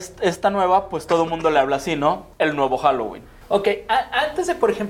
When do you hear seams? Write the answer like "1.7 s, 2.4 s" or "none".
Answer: 2.3 s, 3.4 s

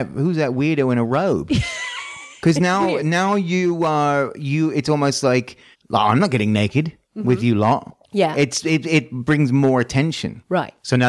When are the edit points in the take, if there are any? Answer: 2.4 s, 5.7 s, 7.0 s, 8.0 s

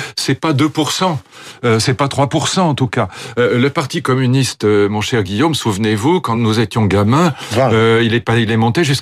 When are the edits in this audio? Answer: none

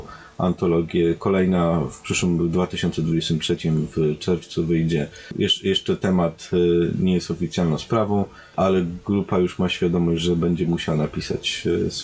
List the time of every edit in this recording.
none

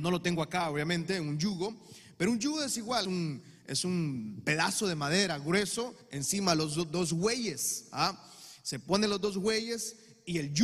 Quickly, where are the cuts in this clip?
3.0 s, 6.0 s

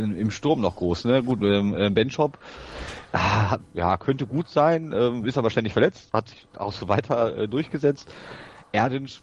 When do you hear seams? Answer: 3.6 s, 6.5 s

